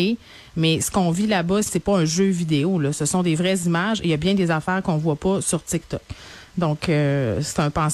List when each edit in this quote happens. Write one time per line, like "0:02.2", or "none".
0:01.7